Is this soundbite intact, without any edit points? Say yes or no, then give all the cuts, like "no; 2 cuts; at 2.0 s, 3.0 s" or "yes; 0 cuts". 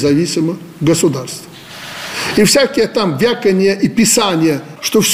yes; 0 cuts